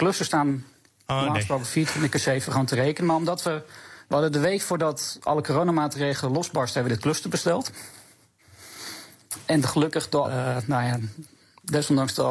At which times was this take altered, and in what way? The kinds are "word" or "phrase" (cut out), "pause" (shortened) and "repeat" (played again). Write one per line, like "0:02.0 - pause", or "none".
0:10.2 - word